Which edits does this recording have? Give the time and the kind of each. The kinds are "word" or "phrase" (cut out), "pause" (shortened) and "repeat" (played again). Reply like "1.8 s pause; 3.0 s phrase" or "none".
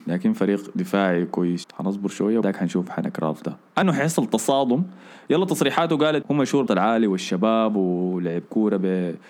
1.6 s word; 2.4 s word; 3.8 s word; 6.2 s word; 6.7 s word